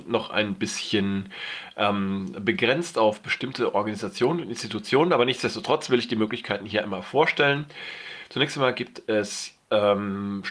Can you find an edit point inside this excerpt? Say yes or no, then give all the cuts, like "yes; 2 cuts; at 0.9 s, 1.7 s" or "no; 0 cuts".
no; 0 cuts